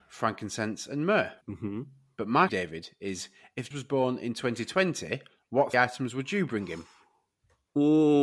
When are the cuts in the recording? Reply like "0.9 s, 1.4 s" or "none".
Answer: 1.4 s, 2.5 s, 3.7 s, 5.7 s